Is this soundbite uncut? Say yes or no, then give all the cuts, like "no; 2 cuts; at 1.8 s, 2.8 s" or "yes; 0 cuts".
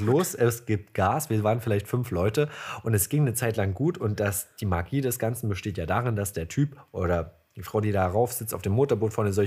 yes; 0 cuts